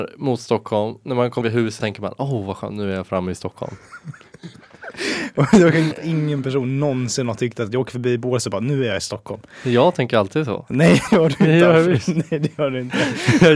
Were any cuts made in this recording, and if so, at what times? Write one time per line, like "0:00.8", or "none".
0:01.4
0:01.8
0:05.9
0:11.1